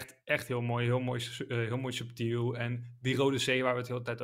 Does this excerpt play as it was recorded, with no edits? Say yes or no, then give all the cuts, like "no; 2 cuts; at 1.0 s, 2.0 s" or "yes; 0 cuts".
yes; 0 cuts